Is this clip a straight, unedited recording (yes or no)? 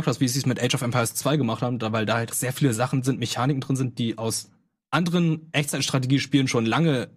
no